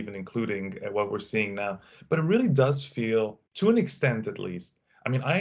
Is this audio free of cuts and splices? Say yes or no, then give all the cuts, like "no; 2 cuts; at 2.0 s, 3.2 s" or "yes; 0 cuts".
no; 1 cut; at 3.5 s